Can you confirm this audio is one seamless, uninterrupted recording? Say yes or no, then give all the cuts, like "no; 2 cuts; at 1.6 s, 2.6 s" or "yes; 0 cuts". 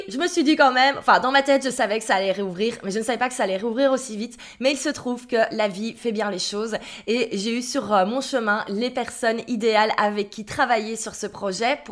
yes; 0 cuts